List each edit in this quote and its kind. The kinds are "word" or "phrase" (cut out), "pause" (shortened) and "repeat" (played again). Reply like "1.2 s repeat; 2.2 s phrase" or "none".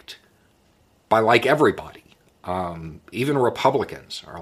none